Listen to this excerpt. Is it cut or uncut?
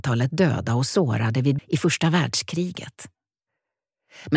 cut